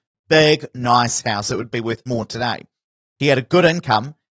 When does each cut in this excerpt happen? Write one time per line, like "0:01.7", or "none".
0:02.1